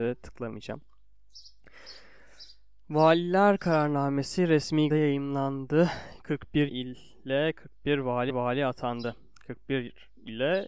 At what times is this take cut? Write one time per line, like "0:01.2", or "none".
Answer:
0:04.9
0:06.7
0:08.3